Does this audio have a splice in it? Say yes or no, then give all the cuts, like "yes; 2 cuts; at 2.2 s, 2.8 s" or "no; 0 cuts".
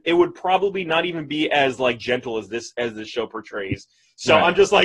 no; 0 cuts